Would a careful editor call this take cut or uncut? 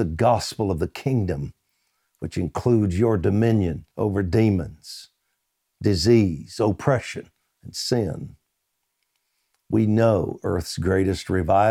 cut